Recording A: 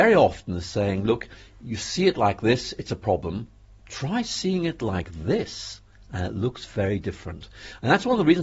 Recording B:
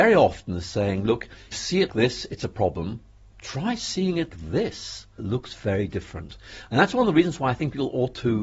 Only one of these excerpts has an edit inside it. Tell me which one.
B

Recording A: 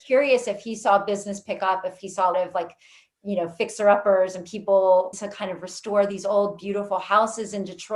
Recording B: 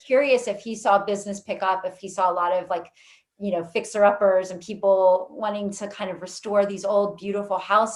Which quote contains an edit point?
A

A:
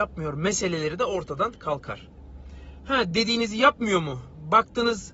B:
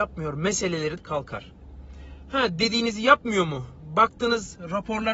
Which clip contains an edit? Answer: B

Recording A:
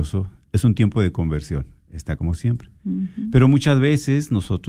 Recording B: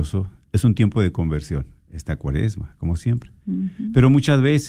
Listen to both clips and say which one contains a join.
A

